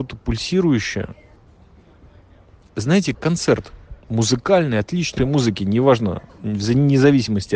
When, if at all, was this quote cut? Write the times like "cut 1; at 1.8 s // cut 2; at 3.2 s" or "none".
cut 1; at 3.1 s // cut 2; at 4.0 s // cut 3; at 5.2 s // cut 4; at 6.3 s